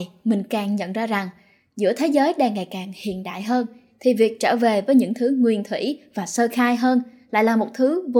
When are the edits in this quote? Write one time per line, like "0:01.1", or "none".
none